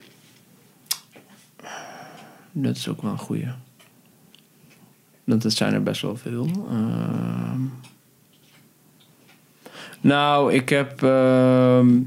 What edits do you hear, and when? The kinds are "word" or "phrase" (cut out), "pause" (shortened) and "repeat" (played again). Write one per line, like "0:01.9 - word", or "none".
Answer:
none